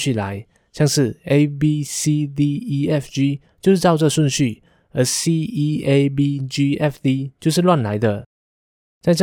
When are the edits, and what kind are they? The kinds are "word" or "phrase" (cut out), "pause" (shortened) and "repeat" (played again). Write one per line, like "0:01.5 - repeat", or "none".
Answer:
none